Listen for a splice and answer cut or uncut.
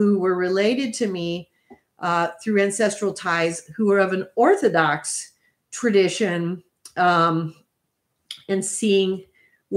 uncut